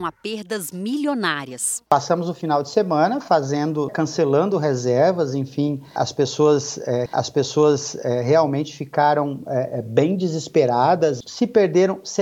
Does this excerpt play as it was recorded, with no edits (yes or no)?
no